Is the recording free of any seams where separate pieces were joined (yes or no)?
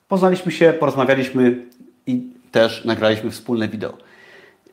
yes